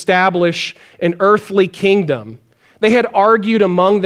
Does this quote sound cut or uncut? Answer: uncut